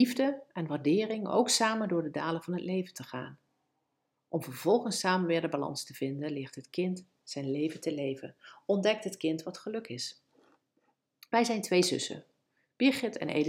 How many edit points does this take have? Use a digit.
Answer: 0